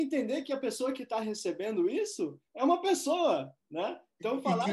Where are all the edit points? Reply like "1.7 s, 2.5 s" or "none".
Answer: 2.5 s, 3.6 s